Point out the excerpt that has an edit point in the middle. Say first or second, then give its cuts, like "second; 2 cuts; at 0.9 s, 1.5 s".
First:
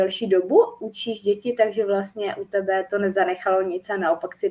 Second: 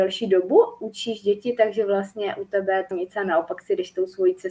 second; 1 cut; at 2.9 s